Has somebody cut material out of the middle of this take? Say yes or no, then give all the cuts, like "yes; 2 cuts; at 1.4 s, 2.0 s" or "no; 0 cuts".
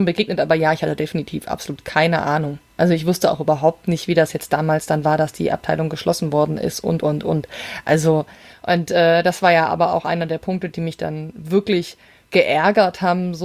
no; 0 cuts